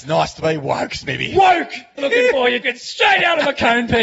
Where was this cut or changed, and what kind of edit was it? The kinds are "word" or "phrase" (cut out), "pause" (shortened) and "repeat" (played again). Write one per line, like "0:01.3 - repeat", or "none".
0:02.0 - phrase
0:02.6 - word